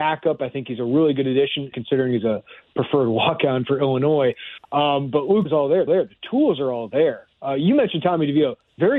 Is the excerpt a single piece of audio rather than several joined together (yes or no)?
no